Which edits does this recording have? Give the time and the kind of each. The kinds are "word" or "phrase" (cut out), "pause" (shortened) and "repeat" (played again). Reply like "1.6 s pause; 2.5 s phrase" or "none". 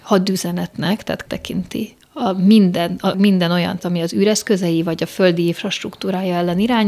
1.3 s word; 3.1 s word; 3.8 s word